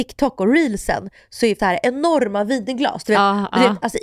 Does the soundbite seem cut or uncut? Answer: cut